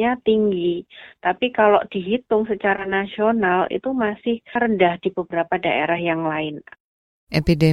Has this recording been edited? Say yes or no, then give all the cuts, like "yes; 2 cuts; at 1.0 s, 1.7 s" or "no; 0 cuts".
no; 0 cuts